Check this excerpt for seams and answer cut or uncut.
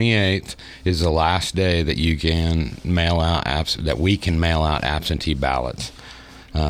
uncut